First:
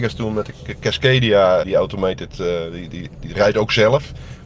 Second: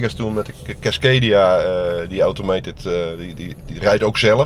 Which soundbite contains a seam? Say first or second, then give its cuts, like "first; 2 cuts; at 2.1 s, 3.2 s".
first; 1 cut; at 1.6 s